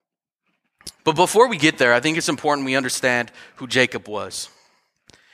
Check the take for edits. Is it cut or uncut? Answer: cut